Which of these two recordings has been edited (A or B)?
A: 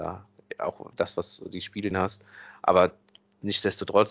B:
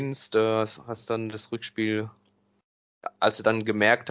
A